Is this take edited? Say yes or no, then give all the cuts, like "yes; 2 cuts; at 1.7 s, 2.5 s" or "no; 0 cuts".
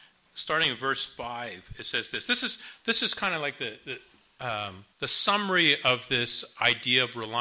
yes; 1 cut; at 4.9 s